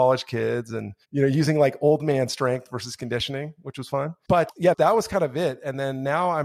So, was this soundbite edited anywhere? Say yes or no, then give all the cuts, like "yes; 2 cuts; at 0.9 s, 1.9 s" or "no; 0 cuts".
yes; 1 cut; at 1.0 s